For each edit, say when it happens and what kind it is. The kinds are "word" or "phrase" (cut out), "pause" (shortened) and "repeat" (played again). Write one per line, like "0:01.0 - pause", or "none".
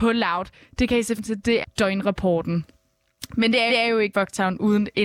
0:01.2 - word
0:01.6 - word
0:03.7 - repeat
0:04.1 - word